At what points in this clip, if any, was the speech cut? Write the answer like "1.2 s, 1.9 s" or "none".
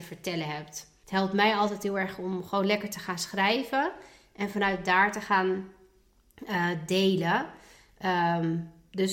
1.0 s